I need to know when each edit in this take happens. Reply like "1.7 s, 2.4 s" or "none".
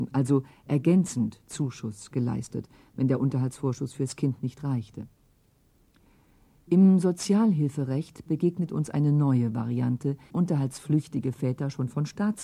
10.3 s

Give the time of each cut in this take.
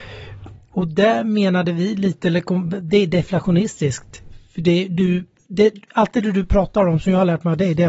none

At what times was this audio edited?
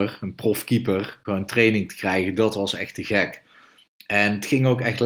none

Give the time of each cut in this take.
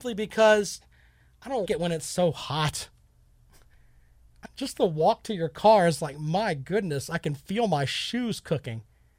1.7 s, 4.5 s

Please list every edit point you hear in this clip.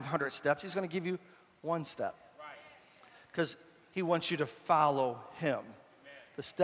none

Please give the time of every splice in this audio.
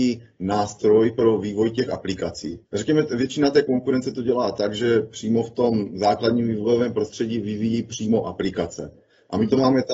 2.7 s

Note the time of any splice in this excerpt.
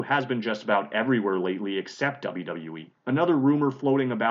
3.0 s

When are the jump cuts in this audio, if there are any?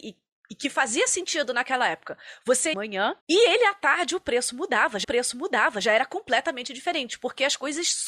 2.7 s, 3.2 s, 5.0 s

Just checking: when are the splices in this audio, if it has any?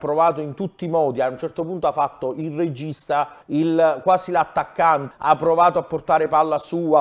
3.4 s, 5.1 s

